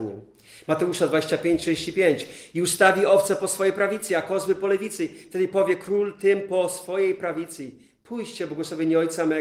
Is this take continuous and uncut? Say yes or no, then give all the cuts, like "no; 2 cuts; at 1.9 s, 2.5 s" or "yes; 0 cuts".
yes; 0 cuts